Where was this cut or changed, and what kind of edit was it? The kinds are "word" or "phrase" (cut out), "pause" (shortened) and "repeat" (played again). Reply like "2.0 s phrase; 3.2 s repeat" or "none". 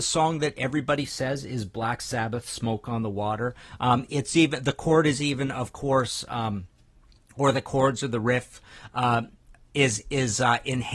none